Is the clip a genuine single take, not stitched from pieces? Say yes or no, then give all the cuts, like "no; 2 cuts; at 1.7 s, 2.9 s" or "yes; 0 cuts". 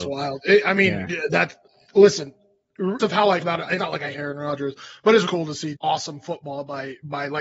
no; 6 cuts; at 3.0 s, 3.4 s, 3.8 s, 4.1 s, 5.3 s, 5.7 s